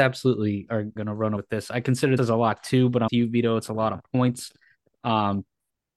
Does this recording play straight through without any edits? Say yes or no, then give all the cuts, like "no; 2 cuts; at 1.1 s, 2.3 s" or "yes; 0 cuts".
no; 4 cuts; at 1.0 s, 1.4 s, 2.2 s, 3.1 s